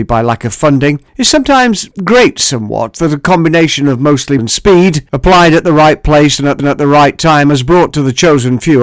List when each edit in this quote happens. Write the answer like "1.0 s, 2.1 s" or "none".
4.4 s, 6.6 s